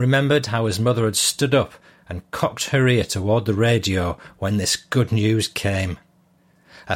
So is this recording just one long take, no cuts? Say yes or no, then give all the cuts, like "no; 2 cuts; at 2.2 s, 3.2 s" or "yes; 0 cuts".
yes; 0 cuts